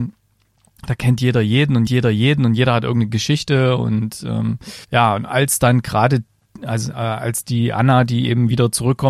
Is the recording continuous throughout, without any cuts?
no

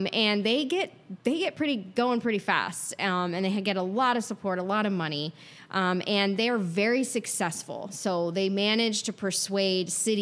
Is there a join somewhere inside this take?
no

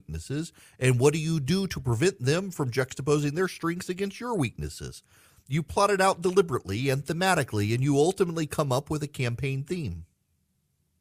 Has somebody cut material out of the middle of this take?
no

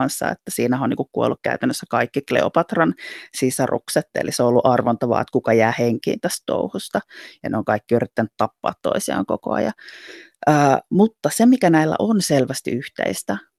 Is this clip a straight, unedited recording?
yes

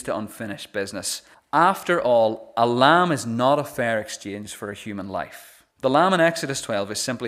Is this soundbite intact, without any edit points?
no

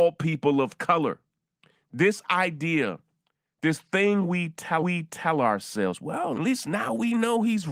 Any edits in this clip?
yes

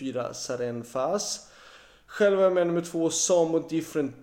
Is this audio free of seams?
yes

